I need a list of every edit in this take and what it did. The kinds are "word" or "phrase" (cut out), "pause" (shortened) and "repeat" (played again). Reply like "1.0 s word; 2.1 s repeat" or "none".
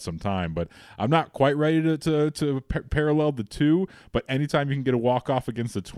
none